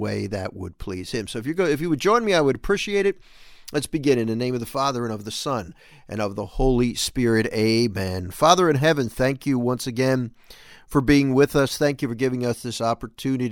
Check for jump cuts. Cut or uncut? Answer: uncut